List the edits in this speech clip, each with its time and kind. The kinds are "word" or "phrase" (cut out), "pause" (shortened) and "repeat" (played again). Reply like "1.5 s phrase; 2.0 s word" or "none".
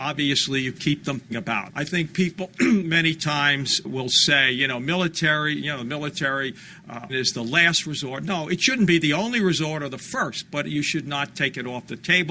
1.3 s word; 1.7 s word; 3.8 s word; 7.1 s word